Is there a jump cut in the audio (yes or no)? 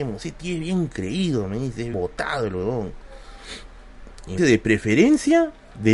yes